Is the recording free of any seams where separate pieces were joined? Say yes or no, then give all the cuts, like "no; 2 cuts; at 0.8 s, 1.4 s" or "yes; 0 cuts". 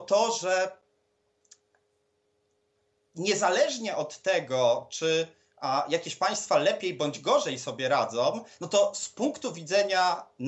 yes; 0 cuts